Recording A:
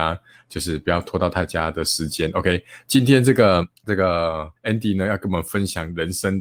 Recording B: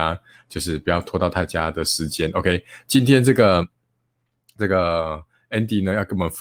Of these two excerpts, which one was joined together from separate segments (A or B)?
A